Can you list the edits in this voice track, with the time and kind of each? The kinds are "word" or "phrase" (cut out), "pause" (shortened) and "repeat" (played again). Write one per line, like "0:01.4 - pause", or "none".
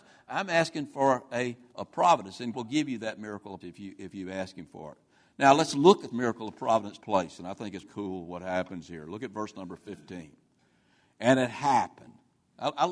0:01.7 - word
0:02.5 - word
0:03.6 - word
0:06.1 - word
0:07.0 - word
0:07.8 - word